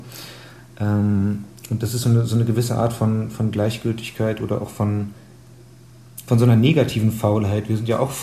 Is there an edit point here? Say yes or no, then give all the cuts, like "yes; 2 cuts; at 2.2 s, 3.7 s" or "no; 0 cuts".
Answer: no; 0 cuts